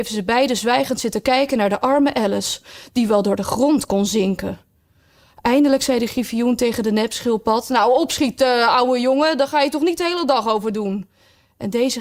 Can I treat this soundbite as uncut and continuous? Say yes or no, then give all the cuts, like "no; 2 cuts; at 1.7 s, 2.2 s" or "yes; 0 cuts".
yes; 0 cuts